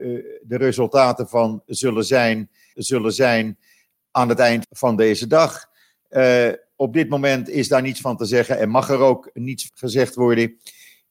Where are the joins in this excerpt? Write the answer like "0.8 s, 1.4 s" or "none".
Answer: 2.7 s, 4.6 s, 9.7 s

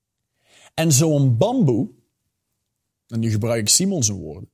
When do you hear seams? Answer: none

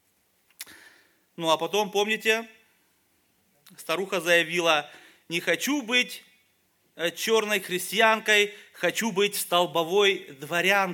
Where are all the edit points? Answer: none

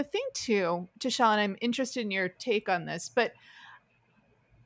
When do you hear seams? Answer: none

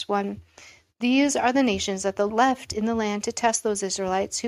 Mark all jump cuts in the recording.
2.3 s

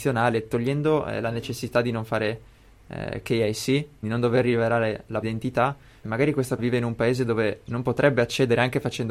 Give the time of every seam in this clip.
4.0 s, 5.2 s, 6.0 s, 6.6 s

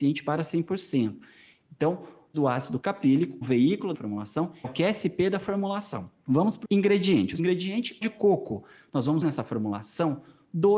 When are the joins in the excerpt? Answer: 2.3 s, 2.8 s, 3.4 s, 3.9 s, 4.6 s, 6.6 s, 7.4 s, 8.0 s, 9.2 s

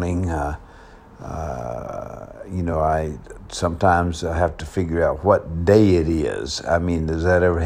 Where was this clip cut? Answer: none

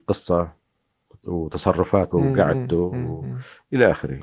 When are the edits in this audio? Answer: 2.1 s

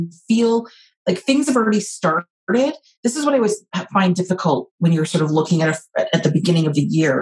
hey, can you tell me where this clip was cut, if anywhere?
none

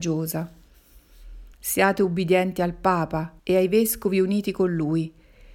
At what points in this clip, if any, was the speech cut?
1.5 s, 3.4 s

